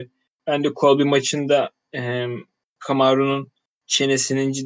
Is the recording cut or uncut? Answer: uncut